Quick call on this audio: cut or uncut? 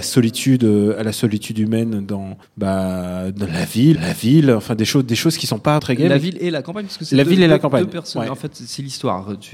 cut